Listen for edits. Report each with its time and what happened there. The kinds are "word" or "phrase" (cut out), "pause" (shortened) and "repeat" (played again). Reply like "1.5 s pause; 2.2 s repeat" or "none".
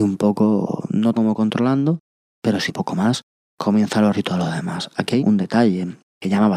1.1 s word; 2.7 s word; 4.1 s word; 5.2 s word